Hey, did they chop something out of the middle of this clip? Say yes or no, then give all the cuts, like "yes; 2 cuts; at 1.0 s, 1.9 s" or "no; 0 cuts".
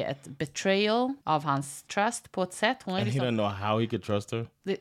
yes; 1 cut; at 1.2 s